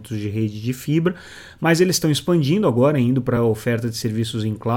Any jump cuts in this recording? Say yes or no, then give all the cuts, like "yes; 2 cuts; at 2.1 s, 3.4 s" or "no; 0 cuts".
no; 0 cuts